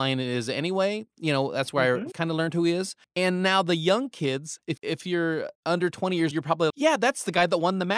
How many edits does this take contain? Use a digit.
6